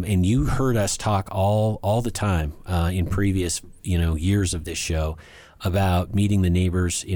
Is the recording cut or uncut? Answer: uncut